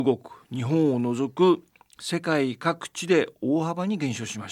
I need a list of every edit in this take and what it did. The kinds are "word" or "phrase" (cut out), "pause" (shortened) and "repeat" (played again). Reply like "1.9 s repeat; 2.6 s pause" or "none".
none